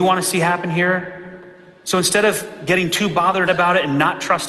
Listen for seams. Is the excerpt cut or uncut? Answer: cut